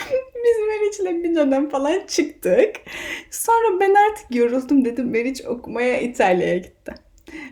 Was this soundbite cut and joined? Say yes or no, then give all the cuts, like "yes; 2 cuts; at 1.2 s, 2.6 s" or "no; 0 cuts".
no; 0 cuts